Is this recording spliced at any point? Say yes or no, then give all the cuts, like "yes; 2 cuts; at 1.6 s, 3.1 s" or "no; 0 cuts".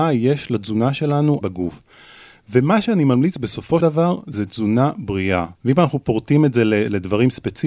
yes; 3 cuts; at 1.4 s, 3.8 s, 5.6 s